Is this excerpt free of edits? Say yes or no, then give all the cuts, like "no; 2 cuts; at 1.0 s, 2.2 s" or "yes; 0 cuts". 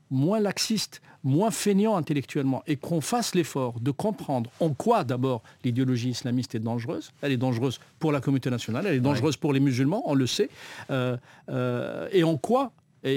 no; 1 cut; at 7.9 s